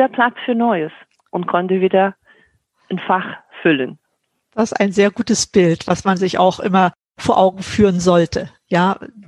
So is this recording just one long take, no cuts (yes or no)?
yes